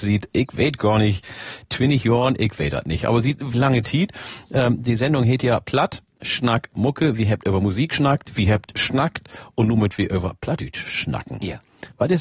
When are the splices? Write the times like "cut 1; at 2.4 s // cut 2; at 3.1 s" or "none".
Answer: cut 1; at 3.5 s